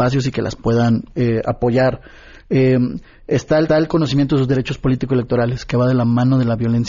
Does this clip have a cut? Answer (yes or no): yes